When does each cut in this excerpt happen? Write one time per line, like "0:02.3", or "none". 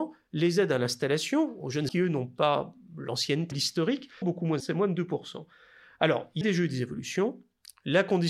0:01.9
0:03.5
0:04.2
0:04.6
0:06.4